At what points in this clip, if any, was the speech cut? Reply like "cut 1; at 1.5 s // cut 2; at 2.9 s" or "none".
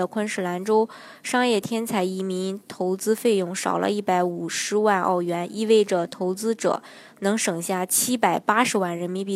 none

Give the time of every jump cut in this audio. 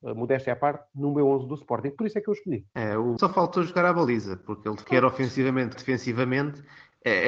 cut 1; at 2.7 s // cut 2; at 3.2 s // cut 3; at 4.8 s // cut 4; at 5.7 s

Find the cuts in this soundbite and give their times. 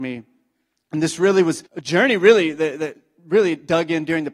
cut 1; at 1.7 s

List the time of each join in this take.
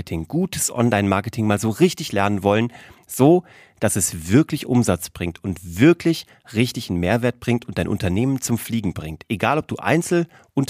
none

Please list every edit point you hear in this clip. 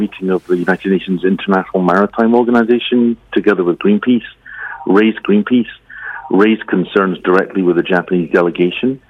cut 1; at 5.2 s

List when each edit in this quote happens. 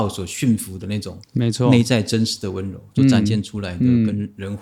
cut 1; at 1.2 s

